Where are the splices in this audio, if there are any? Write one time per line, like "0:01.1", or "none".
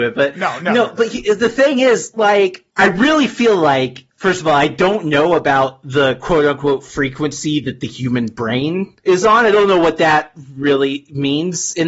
0:02.7
0:09.0